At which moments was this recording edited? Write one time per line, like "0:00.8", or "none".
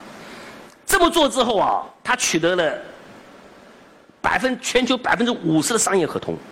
none